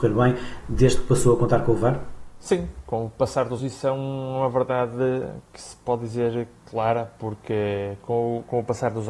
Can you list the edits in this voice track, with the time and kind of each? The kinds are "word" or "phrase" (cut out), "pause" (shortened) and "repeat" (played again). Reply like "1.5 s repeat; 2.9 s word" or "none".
3.6 s word